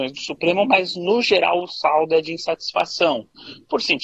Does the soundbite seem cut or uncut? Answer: uncut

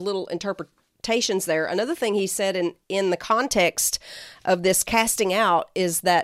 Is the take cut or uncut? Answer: cut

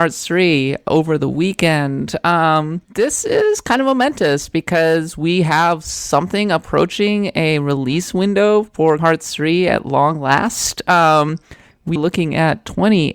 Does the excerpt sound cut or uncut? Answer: cut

